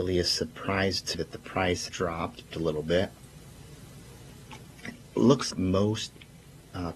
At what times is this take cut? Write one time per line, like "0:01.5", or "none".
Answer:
0:01.1
0:01.9
0:02.5
0:05.5

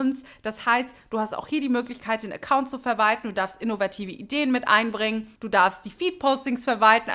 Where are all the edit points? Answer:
0:05.4

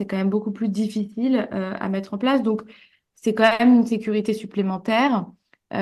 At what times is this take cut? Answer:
none

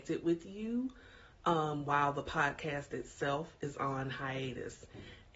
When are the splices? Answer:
none

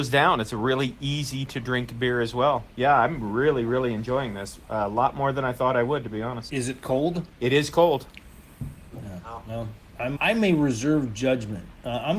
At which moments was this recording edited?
0:10.2

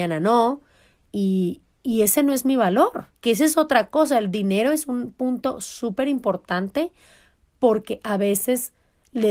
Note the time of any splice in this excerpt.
0:03.2

